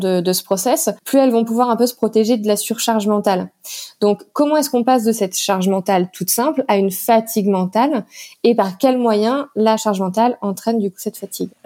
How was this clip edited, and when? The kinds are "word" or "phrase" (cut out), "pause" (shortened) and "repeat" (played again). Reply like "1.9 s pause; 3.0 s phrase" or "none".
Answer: 1.0 s pause

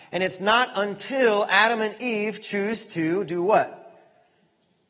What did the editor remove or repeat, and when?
none

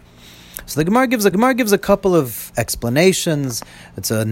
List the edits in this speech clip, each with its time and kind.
1.3 s repeat

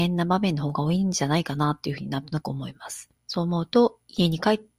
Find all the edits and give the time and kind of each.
3.2 s pause

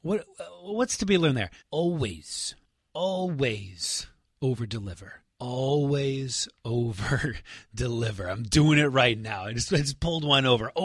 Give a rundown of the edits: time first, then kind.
1.6 s pause; 5.3 s pause

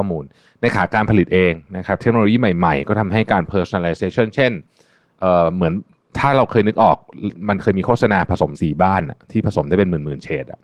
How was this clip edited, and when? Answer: none

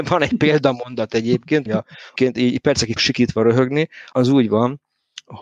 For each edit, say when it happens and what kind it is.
1.7 s word; 2.2 s word; 3.0 s word; 4.1 s word

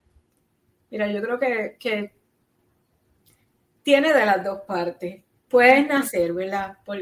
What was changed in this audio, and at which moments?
none

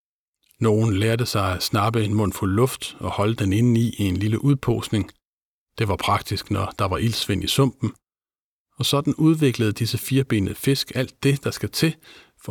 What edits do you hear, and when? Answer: none

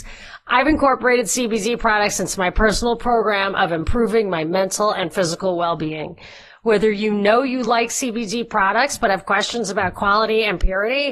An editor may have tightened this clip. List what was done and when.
none

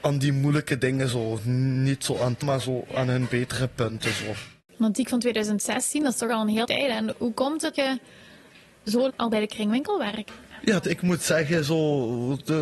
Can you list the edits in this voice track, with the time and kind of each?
2.4 s word; 6.6 s word; 7.1 s word; 7.7 s word; 9.1 s word; 10.8 s word

